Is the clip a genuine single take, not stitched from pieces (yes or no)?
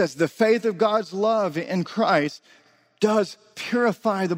yes